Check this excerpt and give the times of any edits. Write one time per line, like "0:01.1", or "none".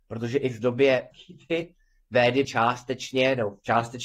0:01.1
0:02.4